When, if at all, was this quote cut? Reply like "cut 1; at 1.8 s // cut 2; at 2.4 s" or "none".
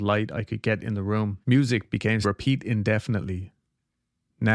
cut 1; at 1.4 s // cut 2; at 2.2 s